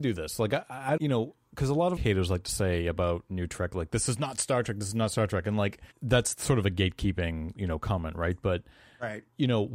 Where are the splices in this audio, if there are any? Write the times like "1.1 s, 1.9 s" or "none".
1.0 s, 2.0 s, 5.9 s